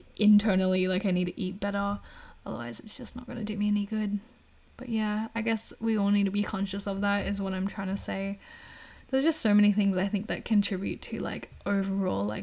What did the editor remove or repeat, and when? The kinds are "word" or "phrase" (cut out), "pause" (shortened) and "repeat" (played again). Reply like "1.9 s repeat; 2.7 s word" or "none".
none